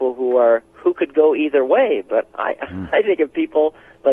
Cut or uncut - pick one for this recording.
uncut